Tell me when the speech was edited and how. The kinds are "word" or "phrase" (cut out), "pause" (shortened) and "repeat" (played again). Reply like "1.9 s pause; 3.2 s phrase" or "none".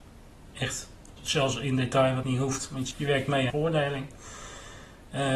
1.2 s word; 2.2 s word; 2.9 s word; 3.5 s phrase